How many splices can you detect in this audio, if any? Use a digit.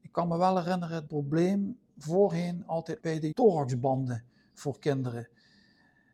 4